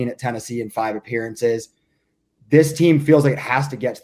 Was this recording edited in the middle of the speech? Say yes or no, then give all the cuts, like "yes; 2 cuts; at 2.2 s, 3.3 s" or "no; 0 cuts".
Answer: no; 0 cuts